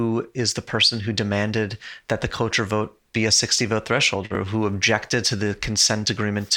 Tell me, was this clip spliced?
no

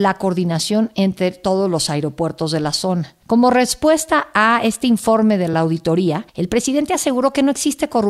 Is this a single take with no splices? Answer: yes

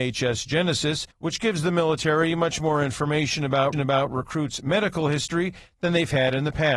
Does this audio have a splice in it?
yes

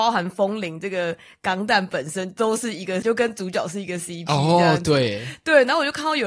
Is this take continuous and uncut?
no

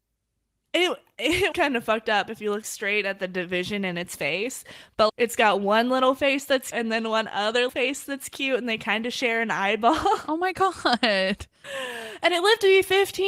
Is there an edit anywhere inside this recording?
yes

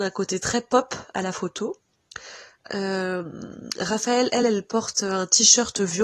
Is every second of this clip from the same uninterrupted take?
yes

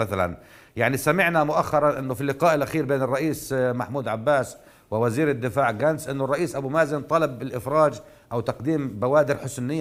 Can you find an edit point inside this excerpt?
no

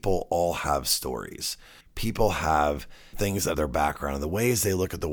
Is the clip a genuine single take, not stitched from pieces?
no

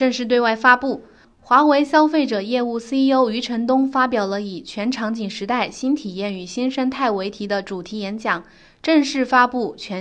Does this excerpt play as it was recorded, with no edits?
yes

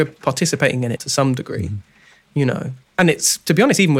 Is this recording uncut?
no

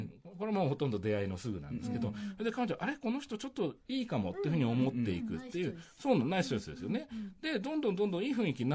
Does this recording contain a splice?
yes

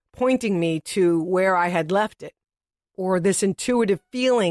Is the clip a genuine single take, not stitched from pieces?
yes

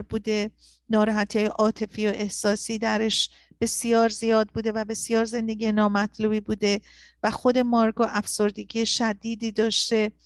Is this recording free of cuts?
yes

